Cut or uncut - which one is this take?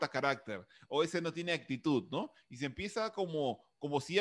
uncut